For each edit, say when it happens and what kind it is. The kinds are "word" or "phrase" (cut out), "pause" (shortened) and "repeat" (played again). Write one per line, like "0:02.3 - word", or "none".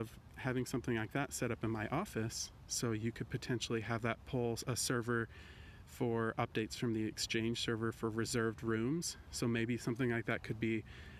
none

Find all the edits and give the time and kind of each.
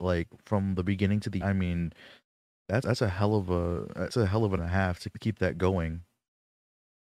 0:01.4 - word
0:02.8 - word
0:04.1 - word
0:04.6 - word
0:05.1 - word

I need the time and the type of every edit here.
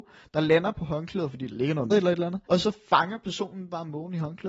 0:01.9 - word
0:02.4 - pause

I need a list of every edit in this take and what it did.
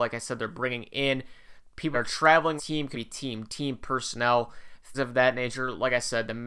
0:01.9 - word
0:02.6 - word
0:02.9 - word
0:03.5 - word
0:04.9 - word

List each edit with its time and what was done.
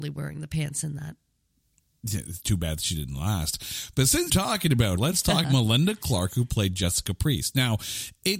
0:04.3 - word
0:05.0 - word
0:05.4 - word

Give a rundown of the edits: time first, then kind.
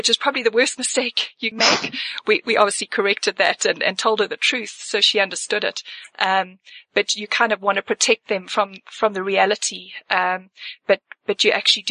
0:01.5 - word

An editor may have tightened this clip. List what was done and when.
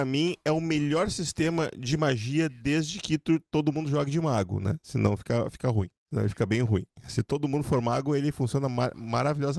0:06.0 - pause

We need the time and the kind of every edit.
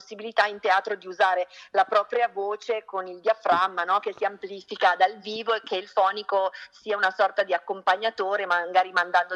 none

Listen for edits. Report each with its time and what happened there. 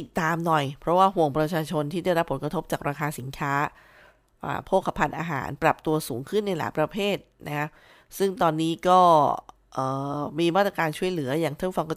none

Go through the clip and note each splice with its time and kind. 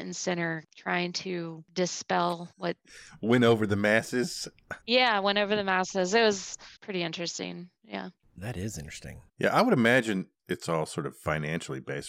0:02.5 - pause
0:04.8 - pause
0:06.8 - pause
0:07.8 - pause
0:09.3 - pause

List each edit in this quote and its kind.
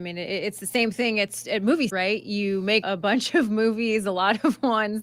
0:01.9 - word
0:02.8 - word

